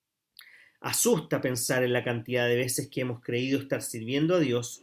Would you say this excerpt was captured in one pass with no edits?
yes; 0 cuts

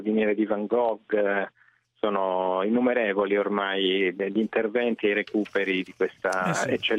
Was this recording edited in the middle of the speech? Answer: no; 0 cuts

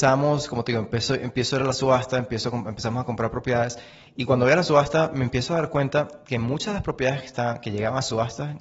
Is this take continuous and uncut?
yes; 0 cuts

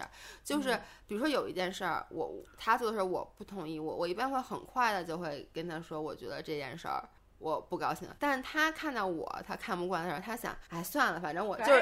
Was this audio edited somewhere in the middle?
yes; 3 cuts; at 7.2 s, 8.2 s, 10.7 s

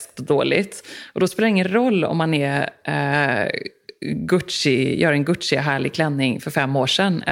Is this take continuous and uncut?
yes; 0 cuts

